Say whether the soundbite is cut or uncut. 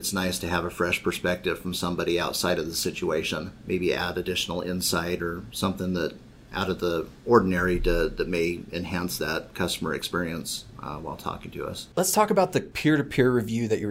cut